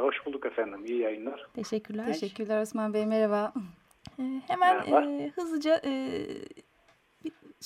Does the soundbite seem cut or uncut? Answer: uncut